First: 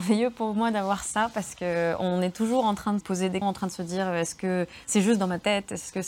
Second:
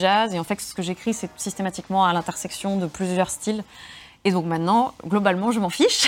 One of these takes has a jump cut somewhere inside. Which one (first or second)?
first